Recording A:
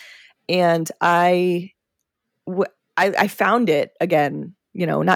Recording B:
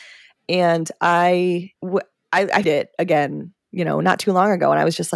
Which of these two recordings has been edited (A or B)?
B